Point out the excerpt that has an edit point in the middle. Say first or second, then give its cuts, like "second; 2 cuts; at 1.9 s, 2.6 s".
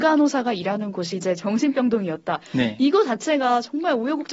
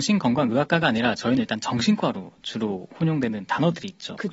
first; 1 cut; at 1.1 s